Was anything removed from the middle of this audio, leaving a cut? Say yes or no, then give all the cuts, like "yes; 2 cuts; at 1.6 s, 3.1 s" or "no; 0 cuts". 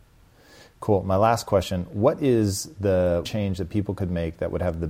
yes; 1 cut; at 3.3 s